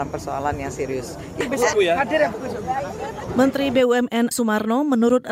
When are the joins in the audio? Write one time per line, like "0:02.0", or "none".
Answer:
0:01.7
0:04.3